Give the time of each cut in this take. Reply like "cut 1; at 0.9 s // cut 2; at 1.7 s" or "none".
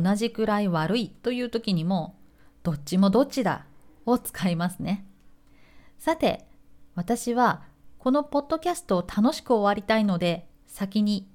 none